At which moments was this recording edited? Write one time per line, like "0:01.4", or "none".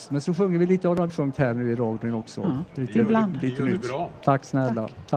0:01.1

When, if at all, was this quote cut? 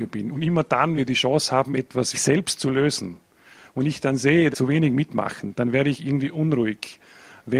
0:01.0
0:02.1
0:04.5

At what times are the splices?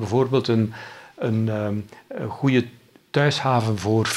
none

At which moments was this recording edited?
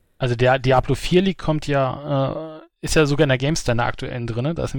none

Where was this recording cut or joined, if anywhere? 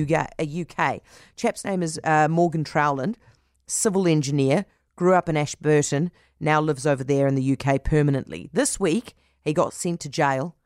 none

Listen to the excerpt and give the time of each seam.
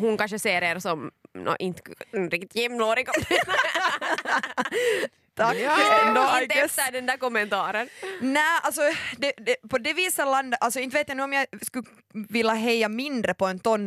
none

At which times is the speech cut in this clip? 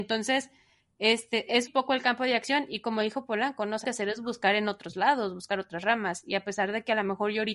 0:01.7
0:03.8

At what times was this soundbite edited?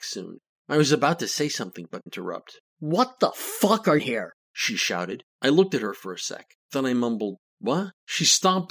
0:02.1
0:04.0
0:04.4
0:07.5

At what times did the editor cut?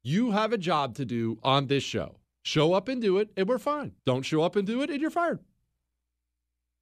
0:02.2
0:04.0

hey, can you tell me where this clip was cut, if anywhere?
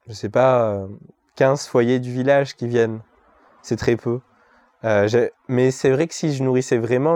none

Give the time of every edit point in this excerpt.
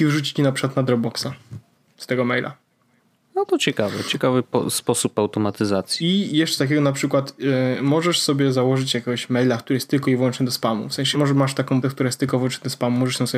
0:06.6
0:11.1
0:11.8

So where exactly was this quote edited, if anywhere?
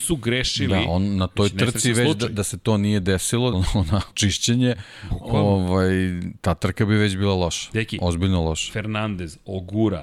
0:03.5
0:04.1

